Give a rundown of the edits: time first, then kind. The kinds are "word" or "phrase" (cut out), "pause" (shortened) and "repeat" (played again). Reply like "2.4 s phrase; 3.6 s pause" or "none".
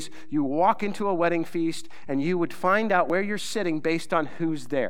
none